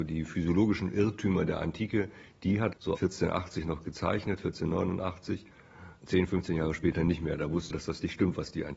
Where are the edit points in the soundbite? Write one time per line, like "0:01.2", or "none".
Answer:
0:02.7
0:07.7